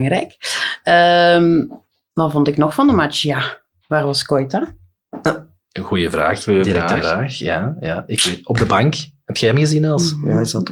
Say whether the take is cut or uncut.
uncut